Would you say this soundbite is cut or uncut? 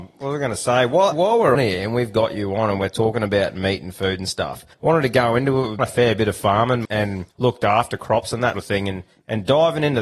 cut